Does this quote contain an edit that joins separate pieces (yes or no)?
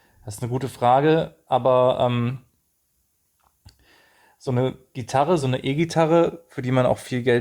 no